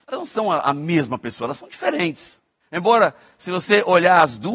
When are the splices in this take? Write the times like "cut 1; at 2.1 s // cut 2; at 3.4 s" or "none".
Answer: none